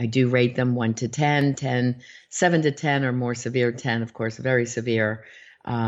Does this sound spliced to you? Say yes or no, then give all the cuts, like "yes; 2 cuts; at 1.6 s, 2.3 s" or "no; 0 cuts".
no; 0 cuts